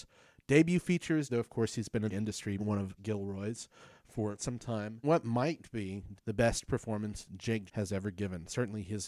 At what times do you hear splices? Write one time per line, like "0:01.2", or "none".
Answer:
0:01.3
0:02.1
0:02.6
0:03.0
0:04.4
0:05.0
0:06.2
0:07.7